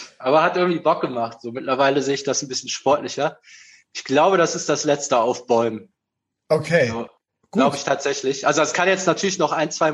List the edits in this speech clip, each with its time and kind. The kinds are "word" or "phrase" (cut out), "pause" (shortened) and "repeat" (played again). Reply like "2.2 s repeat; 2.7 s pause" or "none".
none